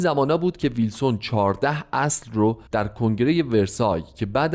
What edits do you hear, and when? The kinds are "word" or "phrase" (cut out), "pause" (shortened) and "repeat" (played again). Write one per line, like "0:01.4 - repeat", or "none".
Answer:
0:02.7 - pause